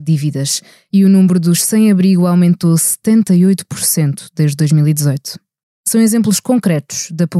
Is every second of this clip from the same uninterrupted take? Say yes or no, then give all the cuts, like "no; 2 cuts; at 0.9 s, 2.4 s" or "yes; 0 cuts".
yes; 0 cuts